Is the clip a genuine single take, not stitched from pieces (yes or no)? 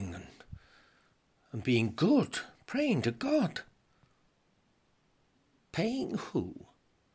yes